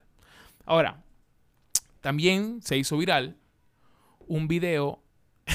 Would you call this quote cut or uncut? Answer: uncut